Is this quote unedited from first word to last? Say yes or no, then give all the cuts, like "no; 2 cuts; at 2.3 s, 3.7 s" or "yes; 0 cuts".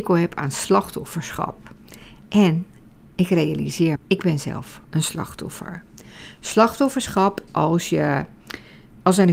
no; 3 cuts; at 4.0 s, 4.8 s, 7.5 s